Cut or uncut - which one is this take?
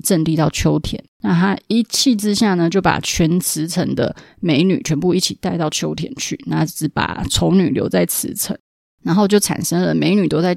cut